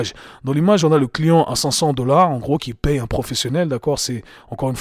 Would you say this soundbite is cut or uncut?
uncut